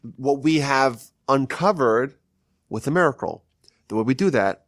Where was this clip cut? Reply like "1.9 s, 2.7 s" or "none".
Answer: none